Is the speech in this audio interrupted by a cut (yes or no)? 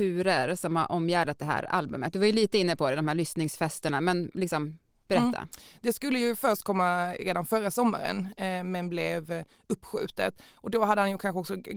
no